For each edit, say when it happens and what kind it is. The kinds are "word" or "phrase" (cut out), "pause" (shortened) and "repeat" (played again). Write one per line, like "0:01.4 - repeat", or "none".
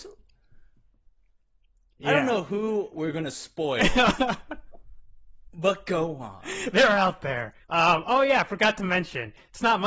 0:07.6 - pause